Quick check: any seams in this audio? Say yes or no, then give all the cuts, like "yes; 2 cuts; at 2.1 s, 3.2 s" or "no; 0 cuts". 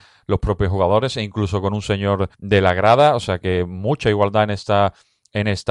yes; 1 cut; at 2.3 s